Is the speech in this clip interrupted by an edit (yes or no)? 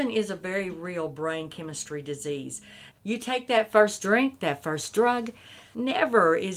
yes